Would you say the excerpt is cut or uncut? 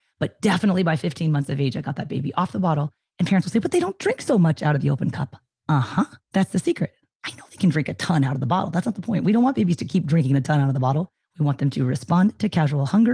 cut